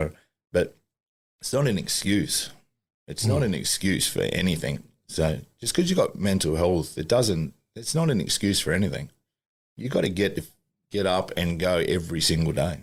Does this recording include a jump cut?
no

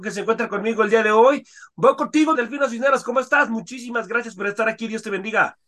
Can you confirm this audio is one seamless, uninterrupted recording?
no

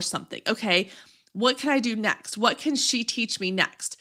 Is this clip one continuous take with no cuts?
yes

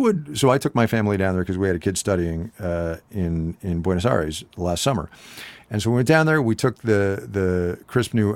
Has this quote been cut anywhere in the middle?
no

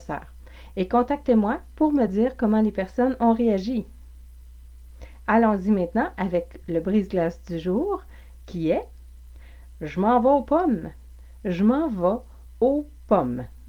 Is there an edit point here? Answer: no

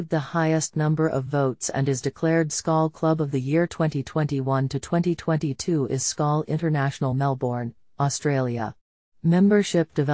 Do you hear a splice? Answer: no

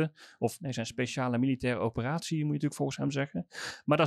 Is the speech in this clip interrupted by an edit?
no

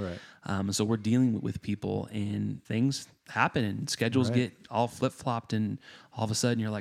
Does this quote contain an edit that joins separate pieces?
yes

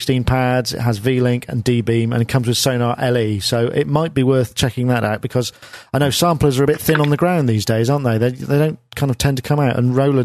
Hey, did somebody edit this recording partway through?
no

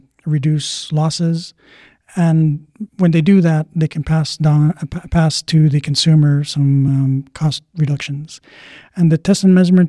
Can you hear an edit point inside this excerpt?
no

